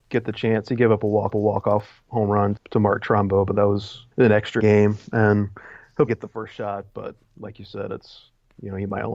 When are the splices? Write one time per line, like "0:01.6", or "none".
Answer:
0:01.3
0:02.6
0:04.1
0:04.6
0:06.1